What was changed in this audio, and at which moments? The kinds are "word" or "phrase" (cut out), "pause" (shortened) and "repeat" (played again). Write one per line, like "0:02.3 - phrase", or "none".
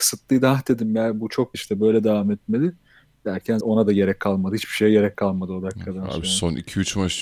0:01.5 - word
0:03.6 - word